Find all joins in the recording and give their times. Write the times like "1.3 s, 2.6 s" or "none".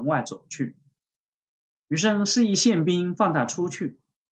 none